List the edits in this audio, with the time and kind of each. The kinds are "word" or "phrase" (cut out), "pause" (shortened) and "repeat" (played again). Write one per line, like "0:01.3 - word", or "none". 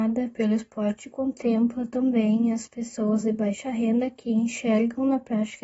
none